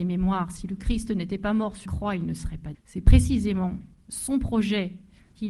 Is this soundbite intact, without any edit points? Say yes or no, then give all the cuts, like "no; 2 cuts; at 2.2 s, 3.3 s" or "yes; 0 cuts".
no; 2 cuts; at 1.9 s, 2.7 s